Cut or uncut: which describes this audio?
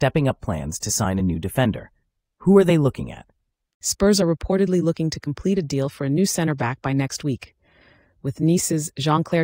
uncut